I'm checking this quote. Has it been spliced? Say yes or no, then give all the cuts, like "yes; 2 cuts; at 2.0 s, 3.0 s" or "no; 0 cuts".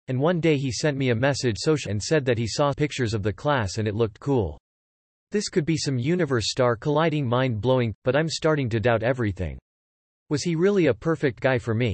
yes; 4 cuts; at 1.6 s, 1.9 s, 2.7 s, 7.9 s